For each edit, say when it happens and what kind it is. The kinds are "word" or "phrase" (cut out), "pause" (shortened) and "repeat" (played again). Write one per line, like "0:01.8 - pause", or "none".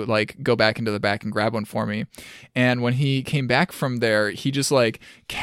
none